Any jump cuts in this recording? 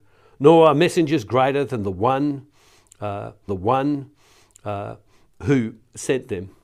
yes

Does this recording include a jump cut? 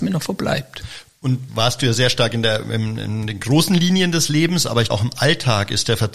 yes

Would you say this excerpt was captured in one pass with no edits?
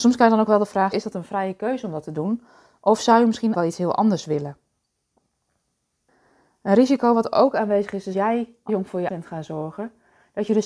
no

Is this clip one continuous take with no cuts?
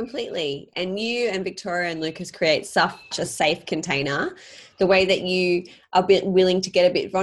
no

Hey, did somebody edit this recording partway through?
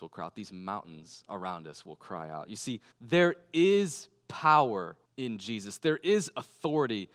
yes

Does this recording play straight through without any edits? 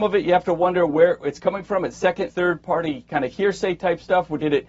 no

